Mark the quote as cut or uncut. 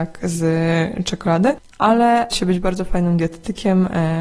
cut